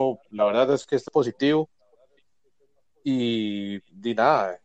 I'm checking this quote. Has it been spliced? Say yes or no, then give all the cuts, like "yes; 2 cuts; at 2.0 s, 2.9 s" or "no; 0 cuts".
yes; 1 cut; at 1.1 s